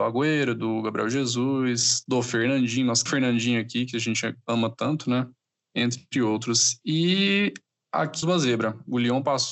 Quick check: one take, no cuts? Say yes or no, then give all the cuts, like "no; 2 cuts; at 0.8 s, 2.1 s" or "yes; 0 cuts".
no; 2 cuts; at 3.1 s, 8.2 s